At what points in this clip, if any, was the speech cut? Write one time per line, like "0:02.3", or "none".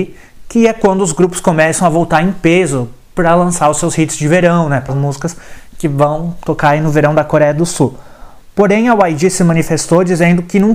0:04.9